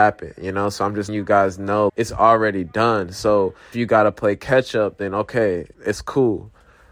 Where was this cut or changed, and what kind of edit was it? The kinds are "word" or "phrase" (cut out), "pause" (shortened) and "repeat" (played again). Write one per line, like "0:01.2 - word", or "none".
0:01.1 - word
0:01.9 - word
0:03.7 - word
0:05.7 - pause

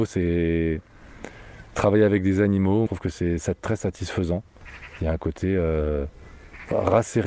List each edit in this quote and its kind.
0:02.9 - phrase

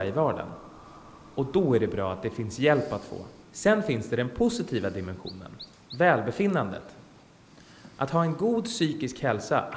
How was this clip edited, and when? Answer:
0:03.4 - pause

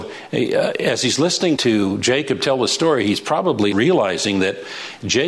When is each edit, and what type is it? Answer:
0:01.6 - word
0:03.7 - word

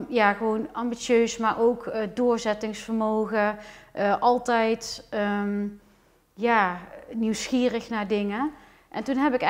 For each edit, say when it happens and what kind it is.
none

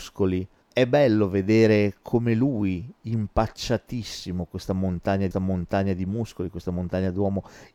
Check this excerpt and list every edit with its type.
0:05.3 - repeat

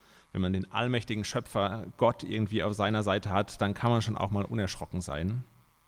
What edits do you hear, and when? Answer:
none

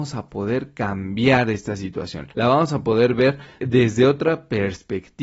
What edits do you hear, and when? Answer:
0:02.3 - pause
0:03.6 - word

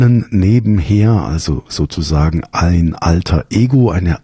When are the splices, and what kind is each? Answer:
none

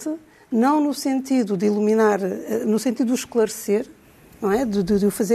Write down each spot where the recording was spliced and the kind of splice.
none

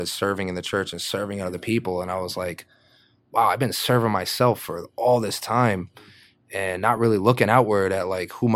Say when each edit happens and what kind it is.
none

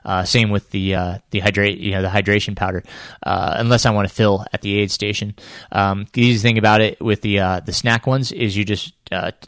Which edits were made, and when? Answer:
none

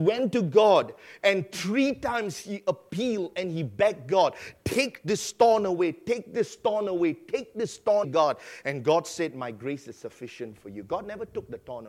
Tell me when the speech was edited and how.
0:08.0 - word

